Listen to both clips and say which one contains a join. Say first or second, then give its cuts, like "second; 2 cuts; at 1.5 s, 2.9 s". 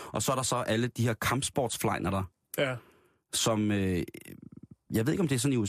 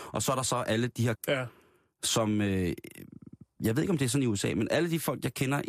second; 1 cut; at 1.1 s